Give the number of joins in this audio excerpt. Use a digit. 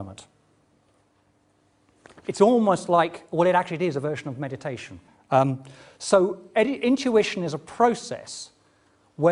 1